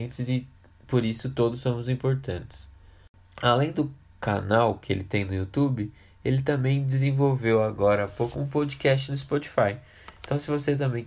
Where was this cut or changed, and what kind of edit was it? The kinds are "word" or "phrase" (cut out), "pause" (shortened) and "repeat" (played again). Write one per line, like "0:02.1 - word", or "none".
0:08.3 - word